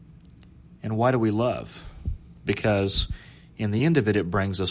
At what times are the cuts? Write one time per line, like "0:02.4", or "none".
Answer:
none

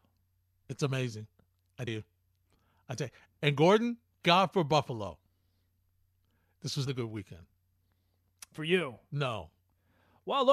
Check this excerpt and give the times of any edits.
0:01.9
0:04.2
0:06.9

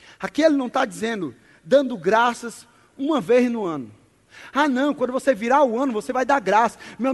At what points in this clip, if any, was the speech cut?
none

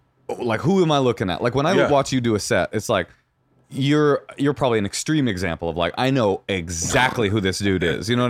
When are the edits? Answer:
none

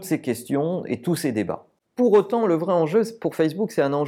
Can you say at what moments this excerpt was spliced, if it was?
none

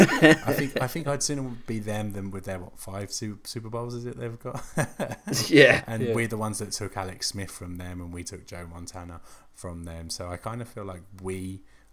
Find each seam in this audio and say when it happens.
none

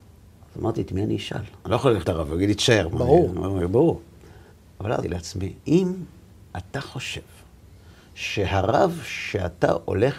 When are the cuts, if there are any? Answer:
0:01.6
0:02.0
0:04.5
0:05.0
0:05.6

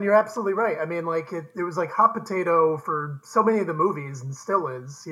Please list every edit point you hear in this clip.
none

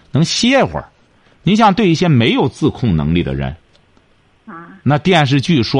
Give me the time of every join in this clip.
none

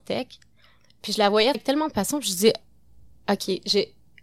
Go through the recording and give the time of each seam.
0:01.5

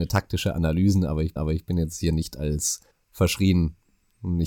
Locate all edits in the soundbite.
0:01.4
0:02.9

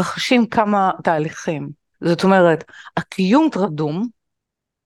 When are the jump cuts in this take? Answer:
0:01.0
0:01.9
0:03.5

